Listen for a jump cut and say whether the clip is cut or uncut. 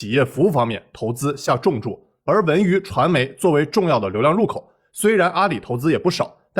cut